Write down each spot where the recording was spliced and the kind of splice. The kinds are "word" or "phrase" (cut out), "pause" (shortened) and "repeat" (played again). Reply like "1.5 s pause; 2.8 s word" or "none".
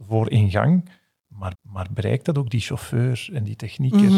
1.5 s repeat